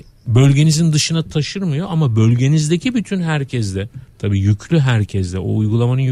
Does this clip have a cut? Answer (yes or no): no